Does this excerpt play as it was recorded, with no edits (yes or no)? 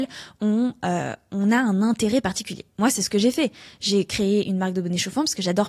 yes